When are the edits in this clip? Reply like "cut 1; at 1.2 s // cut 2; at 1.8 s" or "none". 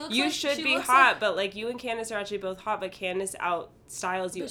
none

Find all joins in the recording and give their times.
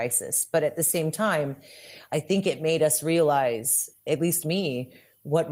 none

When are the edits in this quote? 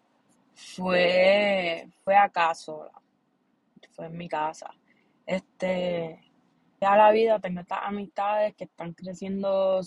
cut 1; at 2.1 s // cut 2; at 6.8 s

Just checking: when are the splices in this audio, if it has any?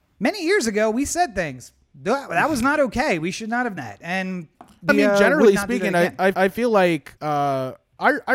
cut 1; at 3.8 s // cut 2; at 4.9 s // cut 3; at 6.3 s // cut 4; at 7.2 s

